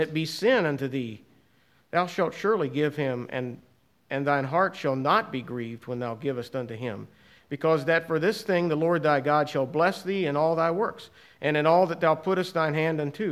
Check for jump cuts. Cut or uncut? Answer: uncut